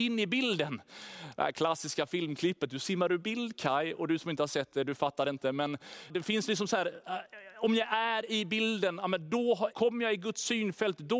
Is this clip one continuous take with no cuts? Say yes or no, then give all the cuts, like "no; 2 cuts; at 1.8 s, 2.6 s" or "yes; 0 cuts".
no; 2 cuts; at 6.1 s, 9.7 s